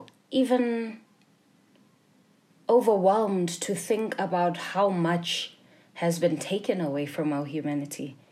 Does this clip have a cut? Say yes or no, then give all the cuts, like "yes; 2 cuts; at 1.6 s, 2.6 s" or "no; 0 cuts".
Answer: no; 0 cuts